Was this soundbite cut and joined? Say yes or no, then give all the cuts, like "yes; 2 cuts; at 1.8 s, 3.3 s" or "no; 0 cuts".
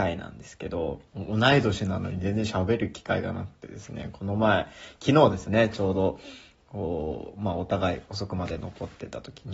yes; 1 cut; at 1.1 s